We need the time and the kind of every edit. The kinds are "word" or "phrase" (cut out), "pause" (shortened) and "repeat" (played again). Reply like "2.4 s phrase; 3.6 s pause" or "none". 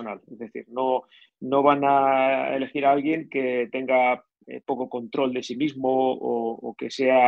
none